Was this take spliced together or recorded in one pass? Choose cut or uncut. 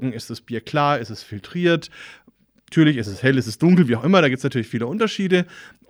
uncut